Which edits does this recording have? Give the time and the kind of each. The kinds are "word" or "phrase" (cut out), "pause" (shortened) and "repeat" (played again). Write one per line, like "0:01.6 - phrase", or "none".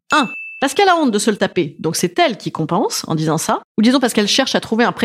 none